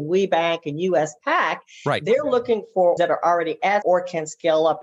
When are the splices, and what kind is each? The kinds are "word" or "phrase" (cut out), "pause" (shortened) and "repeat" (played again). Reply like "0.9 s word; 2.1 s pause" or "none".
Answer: 3.0 s word; 3.8 s word